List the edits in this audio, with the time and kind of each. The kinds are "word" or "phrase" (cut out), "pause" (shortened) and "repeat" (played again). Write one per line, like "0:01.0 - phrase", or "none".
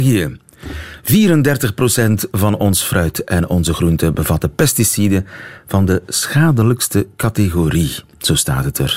none